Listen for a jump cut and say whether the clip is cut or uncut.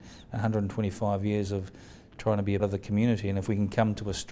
cut